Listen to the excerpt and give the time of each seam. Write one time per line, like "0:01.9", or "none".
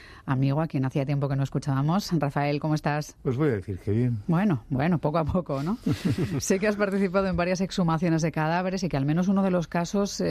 none

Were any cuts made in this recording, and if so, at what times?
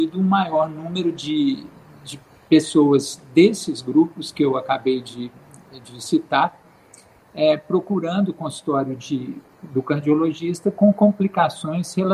none

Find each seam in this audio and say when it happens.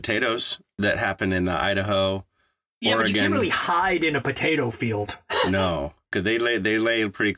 none

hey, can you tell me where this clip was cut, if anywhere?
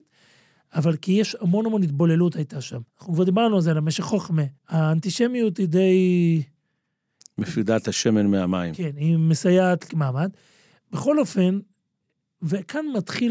0:02.9
0:04.6
0:09.9

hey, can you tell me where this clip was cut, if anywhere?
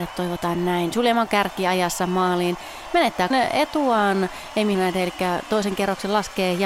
0:01.3
0:03.3
0:04.7

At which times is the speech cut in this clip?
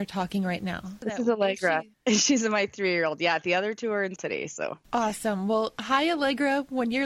0:04.2

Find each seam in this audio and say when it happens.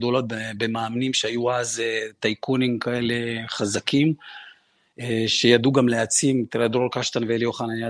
none

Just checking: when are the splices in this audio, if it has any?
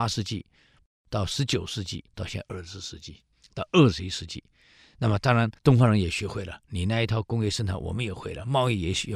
0:02.1
0:03.3
0:05.6

